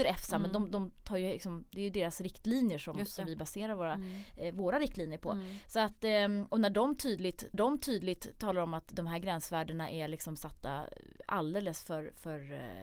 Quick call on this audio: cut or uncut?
cut